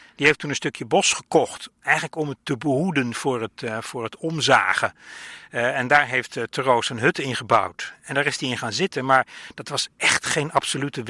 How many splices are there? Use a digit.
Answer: 0